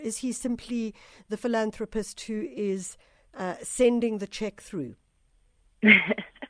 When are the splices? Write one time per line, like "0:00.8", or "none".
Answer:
none